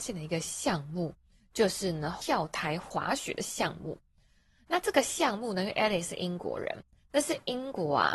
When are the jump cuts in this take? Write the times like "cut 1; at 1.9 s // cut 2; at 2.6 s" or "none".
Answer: none